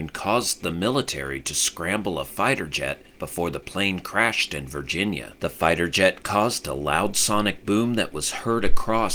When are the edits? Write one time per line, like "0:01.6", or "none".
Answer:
0:03.1
0:05.4